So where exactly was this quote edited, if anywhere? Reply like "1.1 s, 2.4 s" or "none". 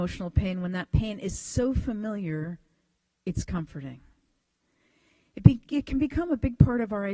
5.7 s